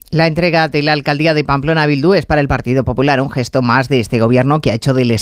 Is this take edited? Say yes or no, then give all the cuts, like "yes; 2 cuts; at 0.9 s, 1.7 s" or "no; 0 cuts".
no; 0 cuts